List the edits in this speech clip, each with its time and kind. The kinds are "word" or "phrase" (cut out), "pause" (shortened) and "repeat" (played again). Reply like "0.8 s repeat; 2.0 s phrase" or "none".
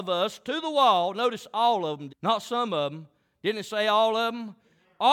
2.1 s word